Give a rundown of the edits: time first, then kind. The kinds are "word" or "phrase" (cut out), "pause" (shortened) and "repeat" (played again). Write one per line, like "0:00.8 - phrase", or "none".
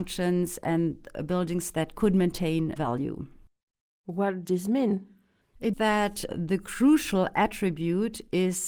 0:02.8 - word
0:04.4 - word
0:05.7 - word
0:06.3 - word